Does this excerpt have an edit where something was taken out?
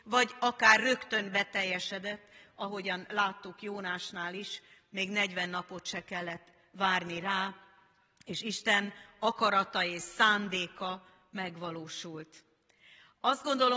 no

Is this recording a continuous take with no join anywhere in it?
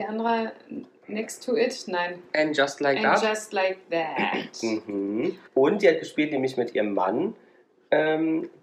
no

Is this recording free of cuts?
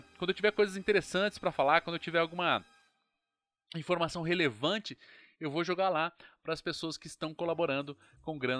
yes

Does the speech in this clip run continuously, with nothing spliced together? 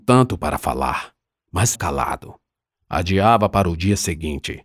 no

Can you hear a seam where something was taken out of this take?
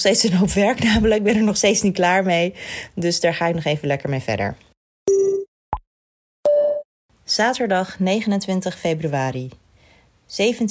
no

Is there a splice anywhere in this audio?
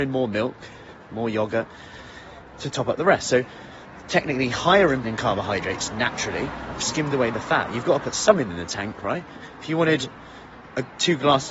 yes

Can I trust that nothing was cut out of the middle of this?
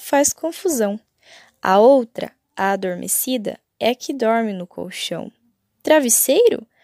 yes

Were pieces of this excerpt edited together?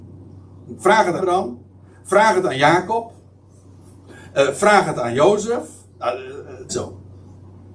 yes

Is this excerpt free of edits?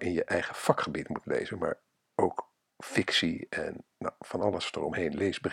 yes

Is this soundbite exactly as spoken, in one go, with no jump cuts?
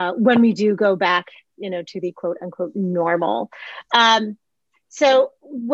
yes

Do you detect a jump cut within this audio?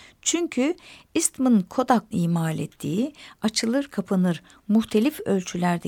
yes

